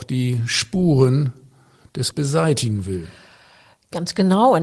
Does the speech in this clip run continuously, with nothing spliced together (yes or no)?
no